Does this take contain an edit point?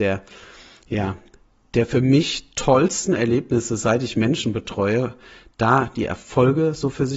no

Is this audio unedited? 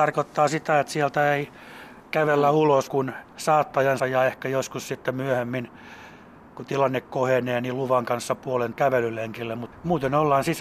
no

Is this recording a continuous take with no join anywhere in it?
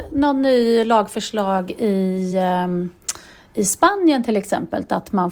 yes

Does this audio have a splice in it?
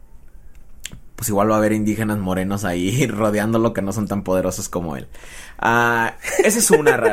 no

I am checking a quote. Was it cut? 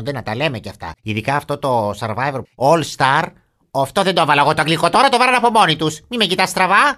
yes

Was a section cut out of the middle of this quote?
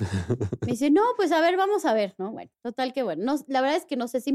yes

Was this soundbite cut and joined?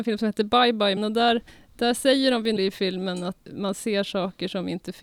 yes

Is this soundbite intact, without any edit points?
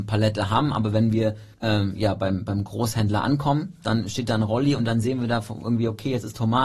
no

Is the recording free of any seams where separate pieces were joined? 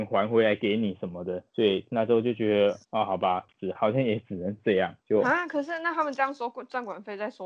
no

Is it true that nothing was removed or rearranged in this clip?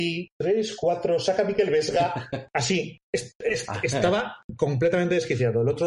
yes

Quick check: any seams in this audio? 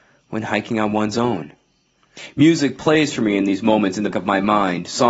yes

